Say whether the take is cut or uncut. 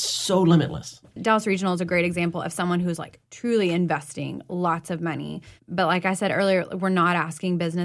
cut